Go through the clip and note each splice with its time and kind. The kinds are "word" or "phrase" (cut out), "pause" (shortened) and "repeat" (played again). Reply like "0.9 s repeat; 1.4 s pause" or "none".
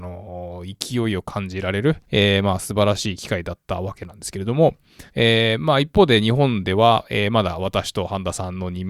2.0 s pause; 5.1 s pause